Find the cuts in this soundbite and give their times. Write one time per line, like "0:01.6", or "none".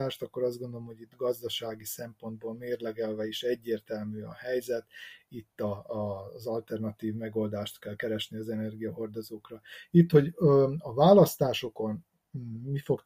none